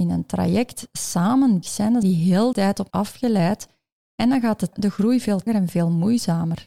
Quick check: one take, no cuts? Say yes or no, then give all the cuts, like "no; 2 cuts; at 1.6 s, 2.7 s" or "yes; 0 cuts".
no; 6 cuts; at 1.6 s, 2.0 s, 2.5 s, 2.9 s, 4.7 s, 5.5 s